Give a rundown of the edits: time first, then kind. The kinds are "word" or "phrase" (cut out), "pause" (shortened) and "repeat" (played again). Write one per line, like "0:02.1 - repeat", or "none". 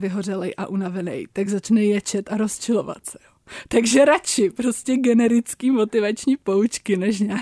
none